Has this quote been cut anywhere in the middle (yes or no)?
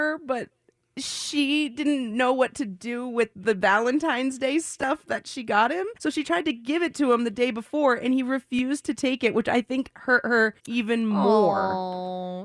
yes